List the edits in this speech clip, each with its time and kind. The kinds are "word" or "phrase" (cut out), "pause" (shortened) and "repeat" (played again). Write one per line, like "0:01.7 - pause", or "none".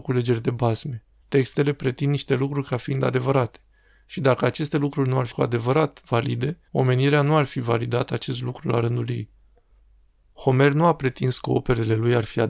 0:01.2 - pause
0:05.3 - word
0:06.7 - pause